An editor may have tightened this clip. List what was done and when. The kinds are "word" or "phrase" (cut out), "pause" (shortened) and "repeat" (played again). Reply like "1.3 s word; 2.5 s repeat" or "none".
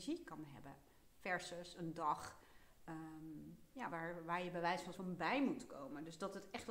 3.9 s word; 4.9 s word

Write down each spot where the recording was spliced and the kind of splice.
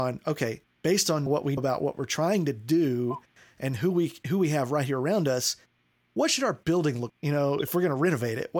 1.3 s word; 1.6 s word; 7.1 s word

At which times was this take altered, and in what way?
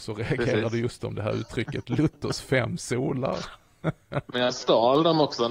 none

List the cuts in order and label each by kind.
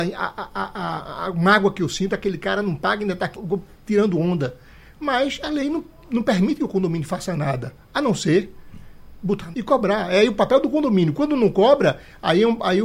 3.4 s word; 9.5 s word

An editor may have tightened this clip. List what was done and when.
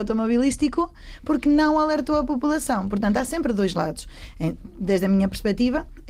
none

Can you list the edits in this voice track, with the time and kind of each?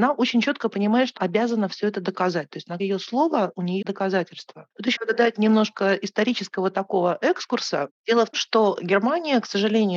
1.2 s word; 2.8 s word; 3.8 s word; 5.0 s word; 8.3 s word

